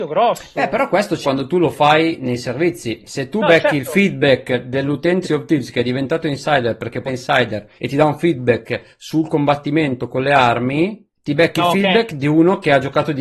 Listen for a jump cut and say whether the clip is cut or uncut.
cut